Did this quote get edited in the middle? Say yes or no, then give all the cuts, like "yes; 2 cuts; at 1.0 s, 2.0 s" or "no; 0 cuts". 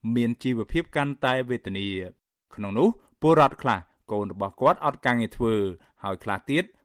no; 0 cuts